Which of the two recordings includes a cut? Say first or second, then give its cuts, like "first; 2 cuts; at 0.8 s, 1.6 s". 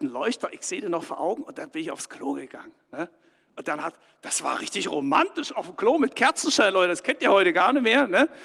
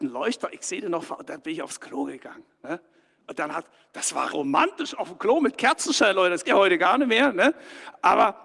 second; 3 cuts; at 1.2 s, 4.3 s, 6.4 s